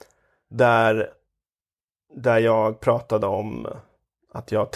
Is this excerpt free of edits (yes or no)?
yes